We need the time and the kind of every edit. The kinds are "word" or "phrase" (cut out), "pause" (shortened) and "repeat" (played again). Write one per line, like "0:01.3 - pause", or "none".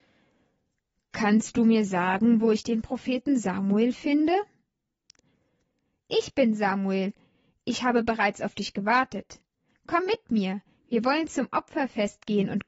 none